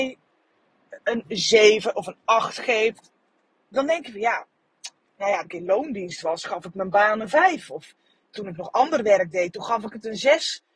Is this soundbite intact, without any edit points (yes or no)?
no